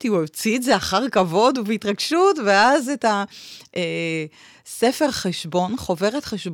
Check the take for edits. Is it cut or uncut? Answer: uncut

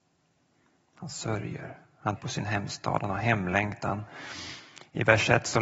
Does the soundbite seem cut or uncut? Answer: cut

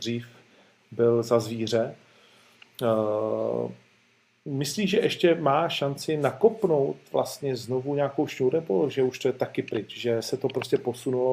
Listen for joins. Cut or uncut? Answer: uncut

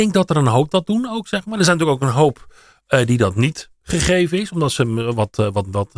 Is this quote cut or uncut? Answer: uncut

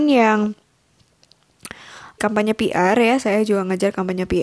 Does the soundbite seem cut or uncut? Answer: cut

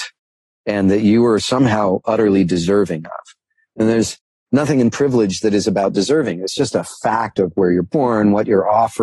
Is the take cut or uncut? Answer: uncut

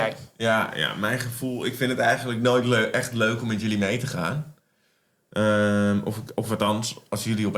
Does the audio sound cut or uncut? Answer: uncut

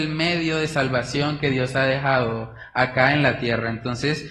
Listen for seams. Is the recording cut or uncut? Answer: uncut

